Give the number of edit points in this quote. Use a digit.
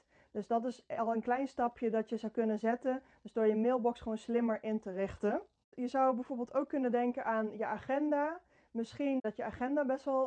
0